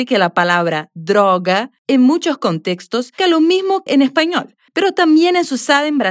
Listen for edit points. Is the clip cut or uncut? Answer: cut